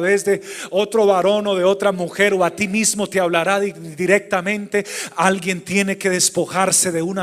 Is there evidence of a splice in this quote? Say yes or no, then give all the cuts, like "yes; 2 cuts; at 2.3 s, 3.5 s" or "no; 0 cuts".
no; 0 cuts